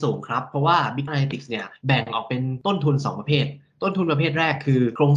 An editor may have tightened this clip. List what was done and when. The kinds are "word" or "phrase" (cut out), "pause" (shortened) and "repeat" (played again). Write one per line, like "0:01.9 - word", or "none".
0:01.1 - word
0:01.8 - pause